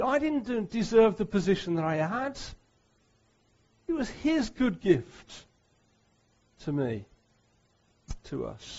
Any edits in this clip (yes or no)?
no